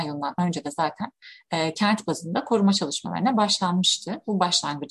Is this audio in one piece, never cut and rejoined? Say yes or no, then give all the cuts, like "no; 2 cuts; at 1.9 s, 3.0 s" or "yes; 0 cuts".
yes; 0 cuts